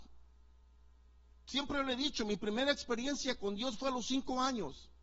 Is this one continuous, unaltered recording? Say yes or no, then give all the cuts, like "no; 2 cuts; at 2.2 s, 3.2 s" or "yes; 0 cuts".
yes; 0 cuts